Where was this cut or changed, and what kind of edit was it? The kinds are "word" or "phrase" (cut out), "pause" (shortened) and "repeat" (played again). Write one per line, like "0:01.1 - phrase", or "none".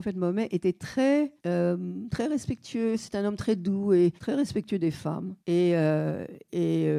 0:01.4 - pause
0:04.2 - pause
0:05.4 - pause